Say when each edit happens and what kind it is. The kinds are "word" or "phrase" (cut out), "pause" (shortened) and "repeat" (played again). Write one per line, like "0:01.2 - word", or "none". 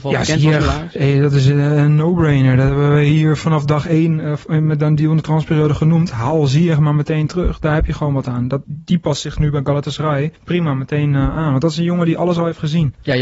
0:01.0 - word
0:08.6 - word
0:10.4 - pause